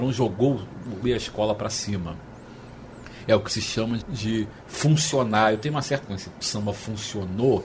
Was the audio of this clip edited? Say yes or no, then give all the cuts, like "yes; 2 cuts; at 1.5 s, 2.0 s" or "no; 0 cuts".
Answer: yes; 4 cuts; at 1.0 s, 4.0 s, 6.0 s, 6.4 s